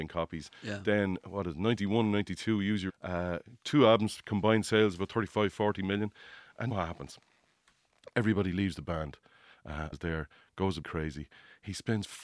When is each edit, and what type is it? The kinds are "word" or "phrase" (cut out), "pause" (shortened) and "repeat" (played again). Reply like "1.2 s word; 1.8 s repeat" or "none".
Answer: 2.9 s word; 6.7 s word; 9.9 s word; 10.8 s word